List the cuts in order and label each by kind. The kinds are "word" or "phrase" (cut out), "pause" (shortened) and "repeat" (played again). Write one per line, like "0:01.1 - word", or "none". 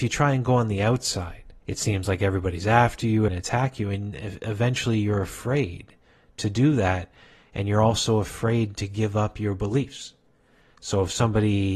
0:01.6 - pause
0:03.3 - phrase

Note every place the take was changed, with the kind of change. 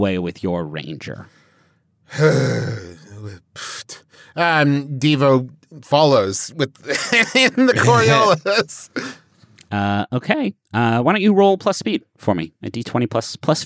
none

